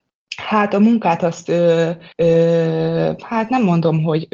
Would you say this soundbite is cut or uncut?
cut